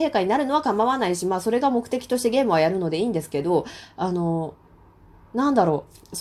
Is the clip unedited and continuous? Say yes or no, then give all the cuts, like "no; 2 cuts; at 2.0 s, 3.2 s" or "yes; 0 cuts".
yes; 0 cuts